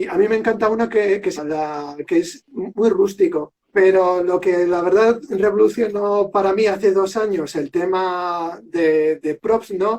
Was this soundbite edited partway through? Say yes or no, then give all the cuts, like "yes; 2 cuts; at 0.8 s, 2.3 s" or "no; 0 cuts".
yes; 3 cuts; at 1.4 s, 2.7 s, 3.6 s